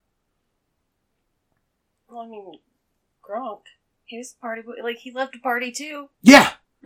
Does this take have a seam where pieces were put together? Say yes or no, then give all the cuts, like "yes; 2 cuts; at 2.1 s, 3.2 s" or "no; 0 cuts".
no; 0 cuts